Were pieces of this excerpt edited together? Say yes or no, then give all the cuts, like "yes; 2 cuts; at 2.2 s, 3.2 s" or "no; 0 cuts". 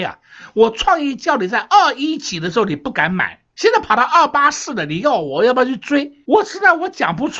yes; 2 cuts; at 3.5 s, 6.2 s